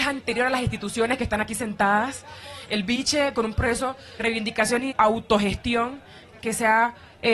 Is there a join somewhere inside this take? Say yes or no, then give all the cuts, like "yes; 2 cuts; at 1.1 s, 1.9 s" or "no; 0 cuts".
yes; 3 cuts; at 3.3 s, 4.2 s, 4.9 s